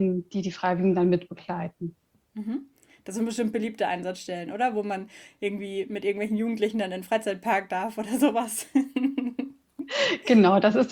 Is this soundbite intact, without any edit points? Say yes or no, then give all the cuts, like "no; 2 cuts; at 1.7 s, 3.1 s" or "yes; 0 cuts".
yes; 0 cuts